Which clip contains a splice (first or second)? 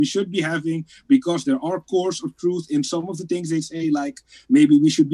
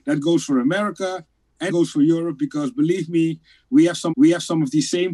second